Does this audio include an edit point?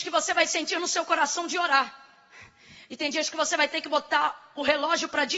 no; 0 cuts

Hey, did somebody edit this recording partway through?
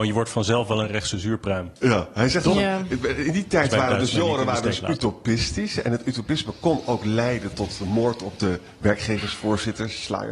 no; 0 cuts

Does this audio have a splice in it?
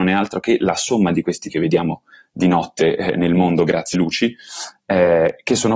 yes; 2 cuts; at 1.5 s, 3.9 s

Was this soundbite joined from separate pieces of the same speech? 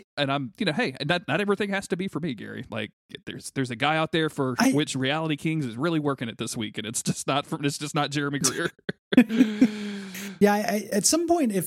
no; 0 cuts

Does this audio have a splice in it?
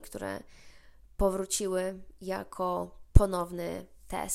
no; 0 cuts

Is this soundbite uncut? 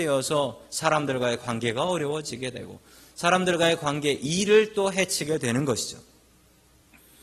yes; 0 cuts

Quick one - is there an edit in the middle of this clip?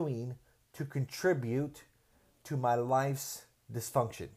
no; 0 cuts

